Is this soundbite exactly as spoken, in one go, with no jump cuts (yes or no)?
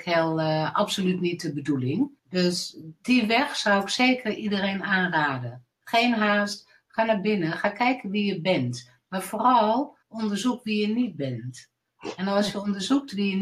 no